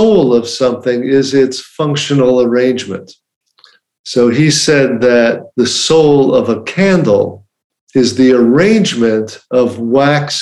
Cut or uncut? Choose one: cut